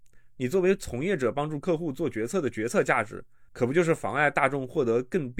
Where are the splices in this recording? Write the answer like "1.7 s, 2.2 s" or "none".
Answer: 3.5 s